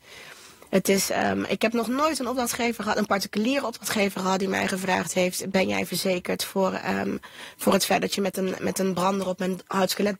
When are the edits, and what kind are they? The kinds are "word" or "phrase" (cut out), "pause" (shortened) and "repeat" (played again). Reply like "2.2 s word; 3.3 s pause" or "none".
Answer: none